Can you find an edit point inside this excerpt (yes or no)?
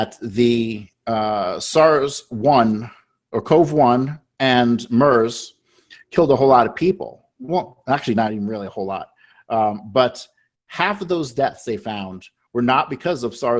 no